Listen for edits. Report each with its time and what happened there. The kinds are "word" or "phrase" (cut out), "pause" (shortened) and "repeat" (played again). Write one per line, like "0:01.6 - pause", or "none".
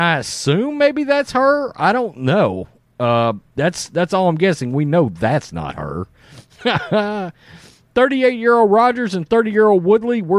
none